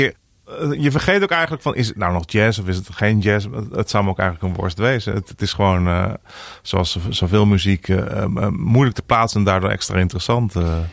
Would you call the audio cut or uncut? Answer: uncut